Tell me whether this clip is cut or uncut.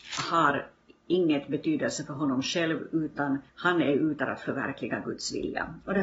cut